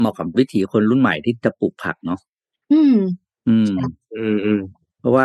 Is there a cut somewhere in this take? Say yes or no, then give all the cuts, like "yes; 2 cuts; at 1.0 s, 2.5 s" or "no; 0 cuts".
yes; 1 cut; at 3.4 s